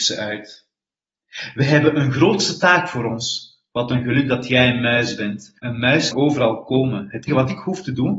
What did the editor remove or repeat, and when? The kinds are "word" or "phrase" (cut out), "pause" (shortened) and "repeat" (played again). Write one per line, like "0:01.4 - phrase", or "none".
0:05.6 - pause
0:06.1 - word
0:07.3 - word